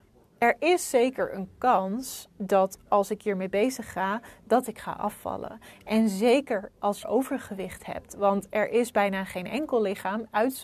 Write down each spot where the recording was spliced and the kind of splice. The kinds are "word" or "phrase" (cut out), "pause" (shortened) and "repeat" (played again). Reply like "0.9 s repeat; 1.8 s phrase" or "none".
7.0 s phrase